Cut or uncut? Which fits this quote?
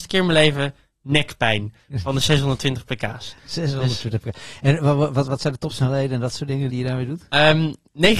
cut